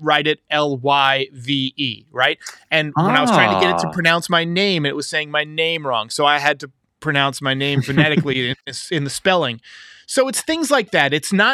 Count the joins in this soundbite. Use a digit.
0